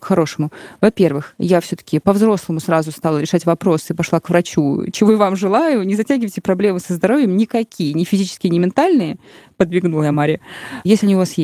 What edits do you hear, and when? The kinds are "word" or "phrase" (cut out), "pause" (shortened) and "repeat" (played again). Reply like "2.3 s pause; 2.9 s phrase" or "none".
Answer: none